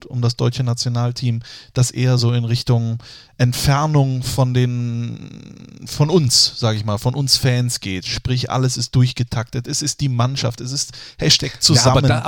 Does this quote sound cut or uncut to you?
uncut